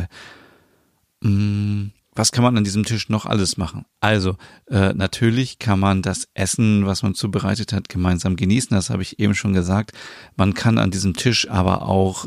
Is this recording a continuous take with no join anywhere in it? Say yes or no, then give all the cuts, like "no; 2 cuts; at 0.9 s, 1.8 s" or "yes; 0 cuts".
yes; 0 cuts